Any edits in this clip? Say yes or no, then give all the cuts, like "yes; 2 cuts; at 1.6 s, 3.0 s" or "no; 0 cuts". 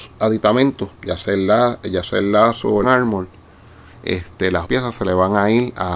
yes; 3 cuts; at 1.0 s, 2.8 s, 4.6 s